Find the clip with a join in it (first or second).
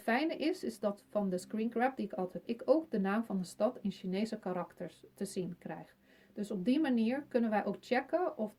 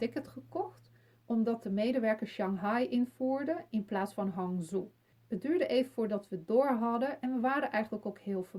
first